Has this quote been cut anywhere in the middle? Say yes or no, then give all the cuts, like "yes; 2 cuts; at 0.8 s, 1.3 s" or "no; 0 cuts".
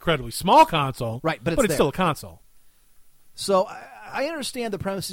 no; 0 cuts